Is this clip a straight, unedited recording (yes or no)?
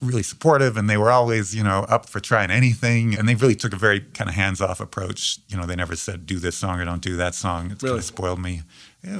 yes